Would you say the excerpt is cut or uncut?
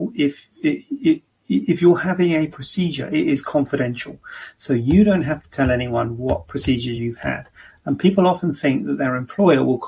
uncut